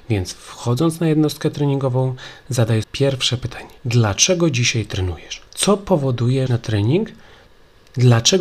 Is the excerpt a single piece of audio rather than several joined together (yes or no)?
no